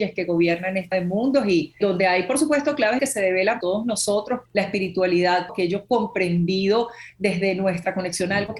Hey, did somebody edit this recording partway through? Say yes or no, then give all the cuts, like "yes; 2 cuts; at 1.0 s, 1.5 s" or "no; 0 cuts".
yes; 6 cuts; at 0.9 s, 1.8 s, 3.0 s, 3.6 s, 4.5 s, 5.5 s